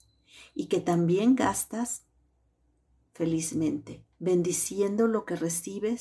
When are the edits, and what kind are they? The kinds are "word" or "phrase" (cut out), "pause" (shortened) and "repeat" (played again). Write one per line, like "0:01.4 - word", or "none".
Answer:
0:04.1 - pause